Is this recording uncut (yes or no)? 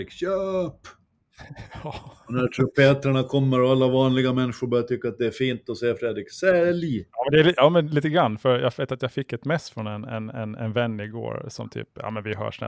no